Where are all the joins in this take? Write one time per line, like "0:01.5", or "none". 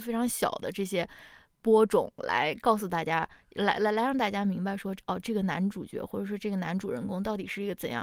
none